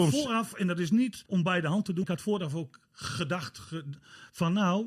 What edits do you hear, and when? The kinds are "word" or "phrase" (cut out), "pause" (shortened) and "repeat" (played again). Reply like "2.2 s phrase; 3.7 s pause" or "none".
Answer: 1.3 s pause; 2.0 s word